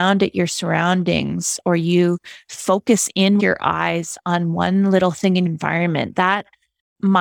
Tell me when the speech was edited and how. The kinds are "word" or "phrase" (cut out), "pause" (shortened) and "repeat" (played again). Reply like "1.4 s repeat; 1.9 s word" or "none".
3.4 s word; 5.5 s word